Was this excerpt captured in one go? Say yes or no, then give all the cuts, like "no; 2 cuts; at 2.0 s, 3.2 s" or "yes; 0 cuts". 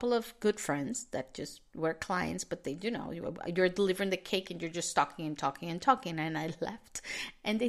yes; 0 cuts